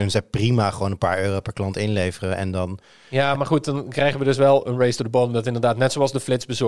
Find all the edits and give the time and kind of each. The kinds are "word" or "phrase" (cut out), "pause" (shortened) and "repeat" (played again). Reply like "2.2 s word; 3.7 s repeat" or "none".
none